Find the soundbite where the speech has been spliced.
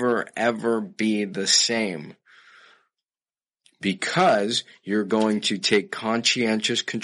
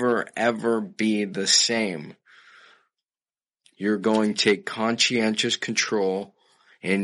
second; 2 cuts; at 3.7 s, 4.3 s

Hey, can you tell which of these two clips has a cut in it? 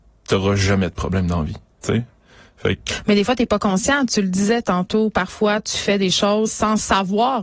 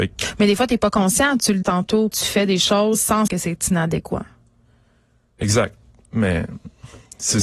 second; 3 cuts; at 1.6 s, 2.1 s, 3.3 s

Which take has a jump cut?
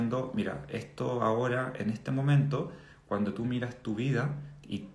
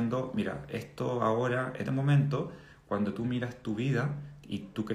second; 1 cut; at 1.8 s

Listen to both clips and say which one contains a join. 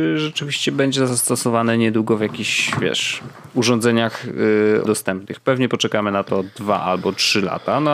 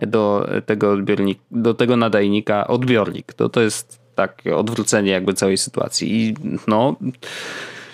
first; 1 cut; at 4.9 s

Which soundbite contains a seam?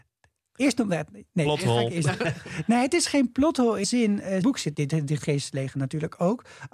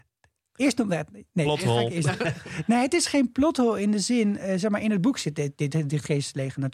first; 3 cuts; at 3.8 s, 4.4 s, 4.7 s

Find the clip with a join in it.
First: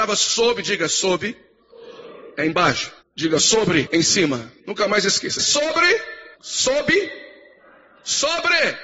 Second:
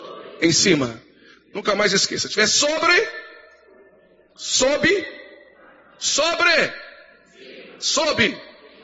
first; 5 cuts; at 3.0 s, 3.9 s, 4.6 s, 5.4 s, 6.4 s

